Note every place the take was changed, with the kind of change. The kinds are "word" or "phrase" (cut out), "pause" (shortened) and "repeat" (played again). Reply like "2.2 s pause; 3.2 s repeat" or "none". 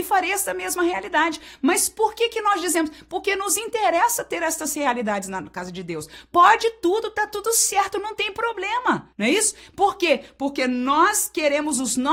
9.1 s pause